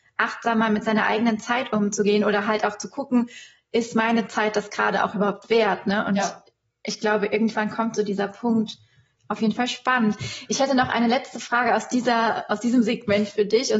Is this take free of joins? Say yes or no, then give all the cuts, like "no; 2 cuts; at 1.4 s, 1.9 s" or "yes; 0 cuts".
yes; 0 cuts